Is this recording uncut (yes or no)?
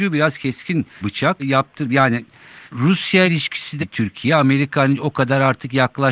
no